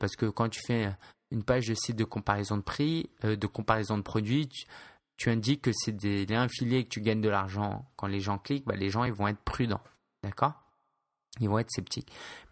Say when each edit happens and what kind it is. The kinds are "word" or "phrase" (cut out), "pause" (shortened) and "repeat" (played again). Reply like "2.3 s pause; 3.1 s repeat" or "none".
none